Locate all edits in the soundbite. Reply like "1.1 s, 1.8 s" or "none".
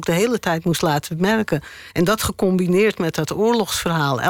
none